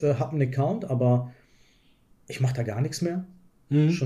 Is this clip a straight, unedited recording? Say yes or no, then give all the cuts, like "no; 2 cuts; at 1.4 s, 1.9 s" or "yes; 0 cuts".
yes; 0 cuts